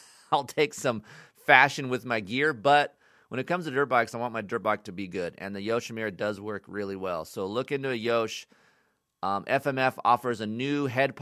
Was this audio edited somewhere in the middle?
no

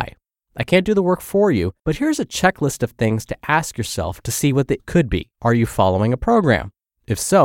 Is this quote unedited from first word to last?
no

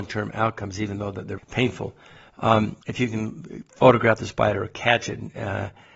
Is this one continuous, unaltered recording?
no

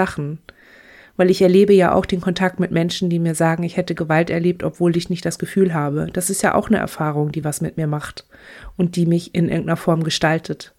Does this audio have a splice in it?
no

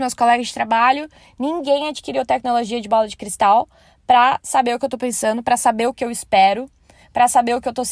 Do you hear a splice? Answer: no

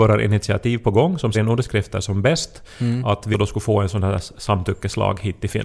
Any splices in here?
yes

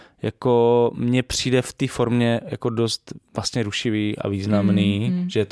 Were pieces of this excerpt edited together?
yes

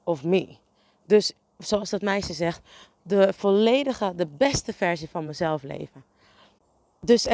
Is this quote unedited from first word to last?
yes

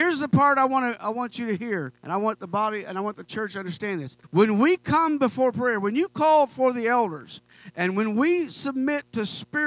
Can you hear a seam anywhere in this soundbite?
yes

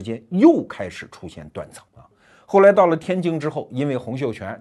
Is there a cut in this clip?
yes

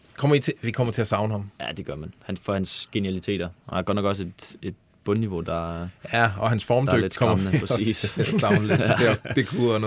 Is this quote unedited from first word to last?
yes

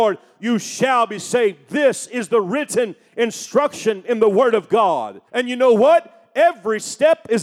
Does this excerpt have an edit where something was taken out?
yes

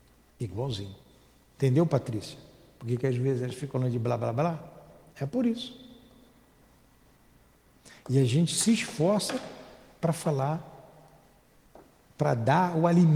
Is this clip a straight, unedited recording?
yes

